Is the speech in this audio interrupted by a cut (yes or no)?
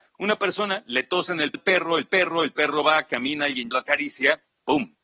yes